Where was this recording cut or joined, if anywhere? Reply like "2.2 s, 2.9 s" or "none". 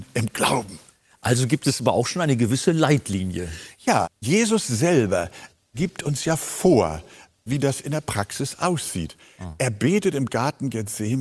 none

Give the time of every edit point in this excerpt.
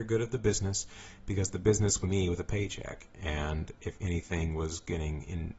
2.0 s

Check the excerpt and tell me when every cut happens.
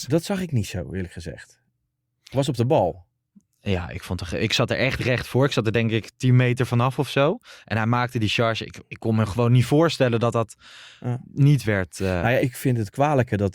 12.4 s

